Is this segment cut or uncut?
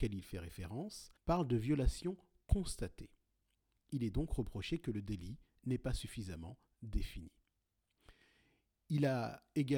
cut